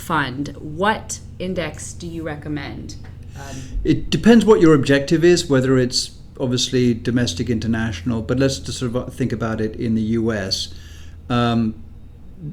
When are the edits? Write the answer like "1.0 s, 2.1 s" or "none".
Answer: none